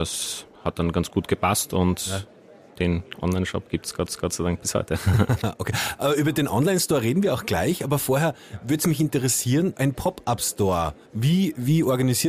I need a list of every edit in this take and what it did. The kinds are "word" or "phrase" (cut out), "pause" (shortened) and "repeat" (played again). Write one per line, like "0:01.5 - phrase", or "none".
0:04.1 - repeat
0:09.8 - word
0:11.1 - pause